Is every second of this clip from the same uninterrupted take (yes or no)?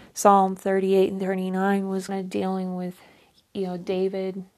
no